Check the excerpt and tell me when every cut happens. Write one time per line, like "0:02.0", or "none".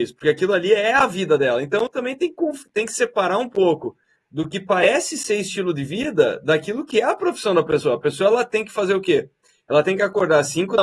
none